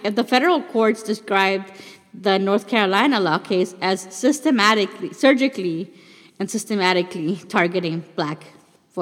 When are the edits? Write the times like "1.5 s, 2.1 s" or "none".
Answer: none